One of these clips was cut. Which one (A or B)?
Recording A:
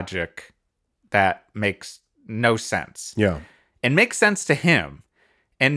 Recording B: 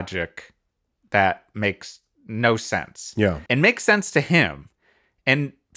B